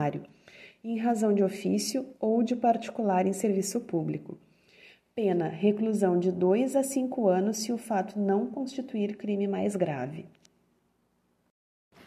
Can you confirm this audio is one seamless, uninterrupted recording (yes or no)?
yes